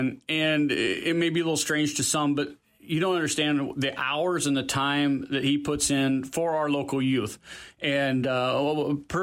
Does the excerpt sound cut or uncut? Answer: uncut